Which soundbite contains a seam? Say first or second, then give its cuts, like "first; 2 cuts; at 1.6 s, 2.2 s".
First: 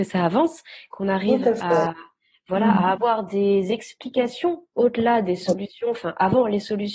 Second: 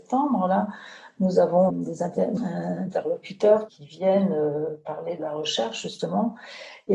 second; 4 cuts; at 1.7 s, 2.4 s, 3.7 s, 5.2 s